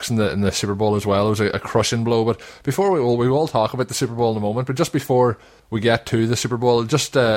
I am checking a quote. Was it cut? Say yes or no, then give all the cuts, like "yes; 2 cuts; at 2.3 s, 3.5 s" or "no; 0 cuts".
no; 0 cuts